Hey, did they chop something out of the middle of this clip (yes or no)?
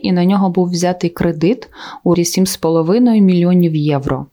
yes